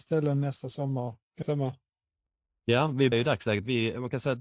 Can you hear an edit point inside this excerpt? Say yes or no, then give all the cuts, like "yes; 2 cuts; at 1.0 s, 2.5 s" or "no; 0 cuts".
yes; 2 cuts; at 1.4 s, 3.1 s